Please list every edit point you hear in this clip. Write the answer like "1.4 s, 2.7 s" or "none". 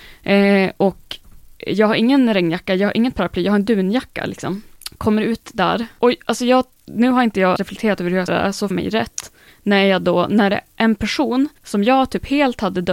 7.6 s, 8.3 s, 8.7 s, 9.5 s, 11.6 s